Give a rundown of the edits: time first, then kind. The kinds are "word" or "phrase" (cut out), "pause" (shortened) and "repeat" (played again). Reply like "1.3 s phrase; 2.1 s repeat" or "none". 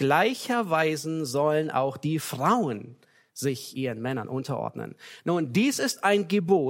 none